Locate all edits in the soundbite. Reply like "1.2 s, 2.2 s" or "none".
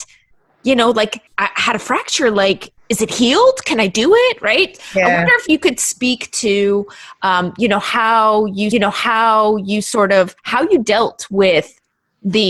1.3 s, 2.8 s, 8.7 s, 10.4 s